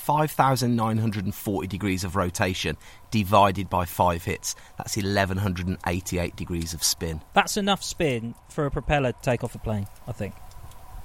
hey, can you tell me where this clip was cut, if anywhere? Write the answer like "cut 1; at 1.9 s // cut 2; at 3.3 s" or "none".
cut 1; at 8.4 s // cut 2; at 9.1 s